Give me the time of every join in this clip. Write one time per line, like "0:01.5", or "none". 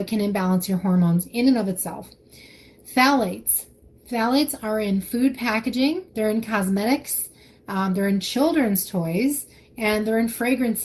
0:06.1